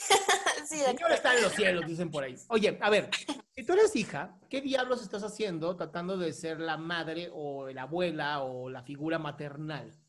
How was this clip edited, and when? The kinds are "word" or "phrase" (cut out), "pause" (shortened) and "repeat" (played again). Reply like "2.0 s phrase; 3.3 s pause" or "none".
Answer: none